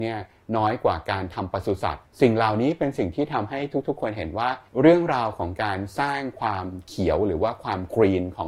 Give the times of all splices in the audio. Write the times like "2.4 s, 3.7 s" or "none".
4.7 s